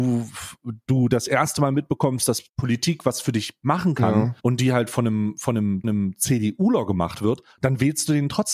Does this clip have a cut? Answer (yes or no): yes